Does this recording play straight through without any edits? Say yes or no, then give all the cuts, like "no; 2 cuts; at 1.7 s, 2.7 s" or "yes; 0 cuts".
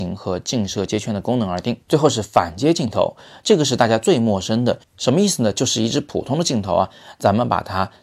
no; 1 cut; at 1.8 s